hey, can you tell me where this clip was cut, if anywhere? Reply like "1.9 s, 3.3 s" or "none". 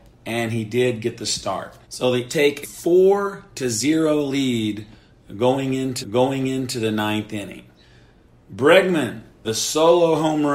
1.8 s, 2.3 s, 2.6 s, 6.0 s, 9.4 s